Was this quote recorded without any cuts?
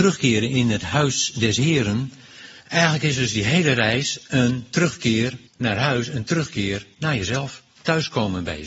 no; 2 cuts; at 2.6 s, 5.5 s

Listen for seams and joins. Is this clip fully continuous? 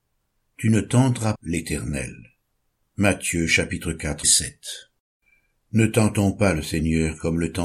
no; 2 cuts; at 1.3 s, 4.2 s

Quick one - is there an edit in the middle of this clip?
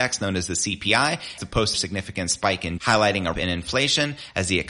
yes; 4 cuts; at 1.4 s, 1.7 s, 2.8 s, 3.3 s

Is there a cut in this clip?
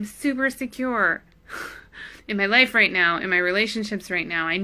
yes; 1 cut; at 2.2 s

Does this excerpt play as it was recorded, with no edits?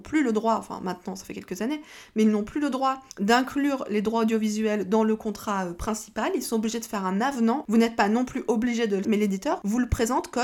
no; 2 cuts; at 3.1 s, 9.0 s

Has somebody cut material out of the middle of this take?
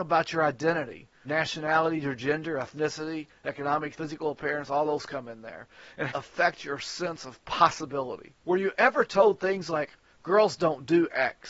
yes; 4 cuts; at 1.2 s, 3.9 s, 6.1 s, 8.4 s

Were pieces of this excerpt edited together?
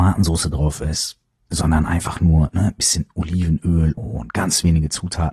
yes; 1 cut; at 4.0 s

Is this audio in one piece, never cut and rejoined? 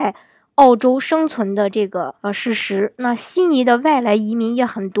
no; 1 cut; at 2.2 s

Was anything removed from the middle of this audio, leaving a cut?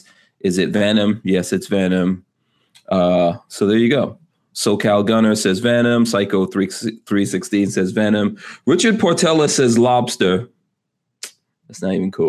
no; 0 cuts

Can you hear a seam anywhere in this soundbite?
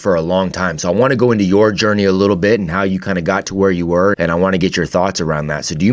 yes; 1 cut; at 4.1 s

